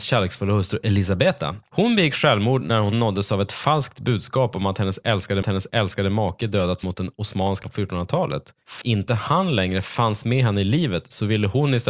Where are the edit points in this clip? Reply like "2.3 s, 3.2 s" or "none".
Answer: 5.4 s, 6.8 s, 7.6 s, 8.8 s